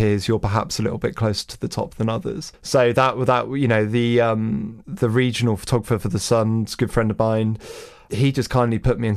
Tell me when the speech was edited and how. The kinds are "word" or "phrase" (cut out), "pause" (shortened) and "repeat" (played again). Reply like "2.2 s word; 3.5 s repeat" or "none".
none

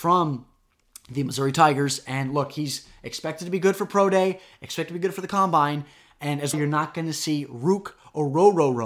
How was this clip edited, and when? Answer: 6.5 s word

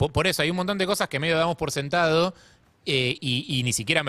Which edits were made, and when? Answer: none

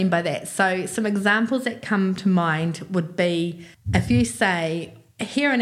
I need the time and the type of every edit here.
3.7 s pause

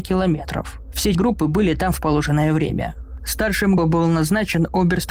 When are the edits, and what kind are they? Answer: 1.1 s word; 3.8 s word

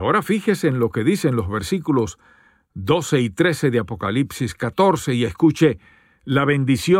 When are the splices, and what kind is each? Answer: none

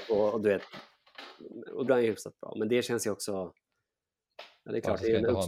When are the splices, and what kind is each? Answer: 1.9 s word

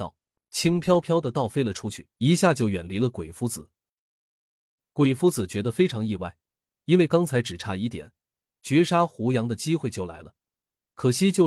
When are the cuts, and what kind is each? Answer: 2.1 s pause

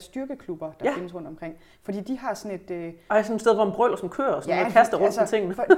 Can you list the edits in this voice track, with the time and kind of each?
none

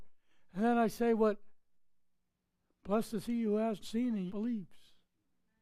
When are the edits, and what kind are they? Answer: 3.8 s word; 4.3 s word

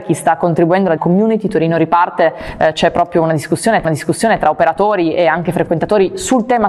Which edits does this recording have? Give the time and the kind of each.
1.0 s phrase; 3.8 s repeat

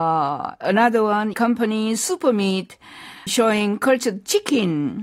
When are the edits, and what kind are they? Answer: 1.3 s word; 3.3 s word

